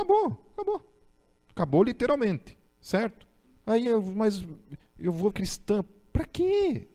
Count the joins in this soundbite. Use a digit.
4